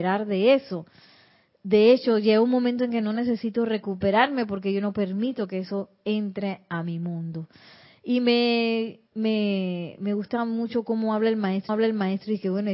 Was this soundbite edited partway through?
yes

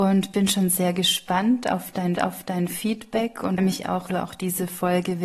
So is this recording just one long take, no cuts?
no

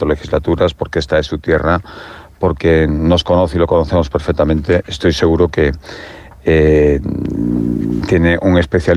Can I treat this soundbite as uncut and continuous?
yes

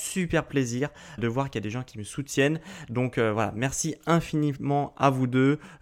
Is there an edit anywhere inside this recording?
yes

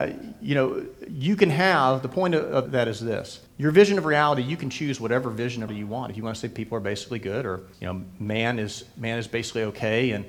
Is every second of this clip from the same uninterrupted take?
no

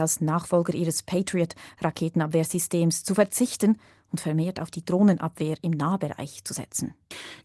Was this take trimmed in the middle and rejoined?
no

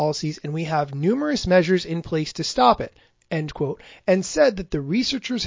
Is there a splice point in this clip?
no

